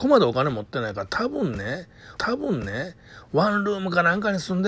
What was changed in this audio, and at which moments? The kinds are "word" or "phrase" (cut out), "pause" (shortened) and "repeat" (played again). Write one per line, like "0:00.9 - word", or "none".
0:02.2 - repeat